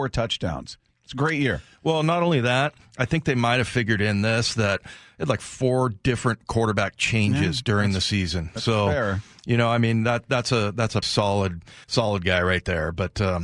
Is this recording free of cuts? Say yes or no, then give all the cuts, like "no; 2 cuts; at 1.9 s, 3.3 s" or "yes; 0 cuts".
no; 2 cuts; at 11.0 s, 11.8 s